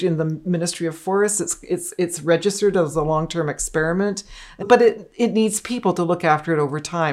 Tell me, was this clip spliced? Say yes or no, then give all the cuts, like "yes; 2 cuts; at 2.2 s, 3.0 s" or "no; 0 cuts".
yes; 1 cut; at 4.6 s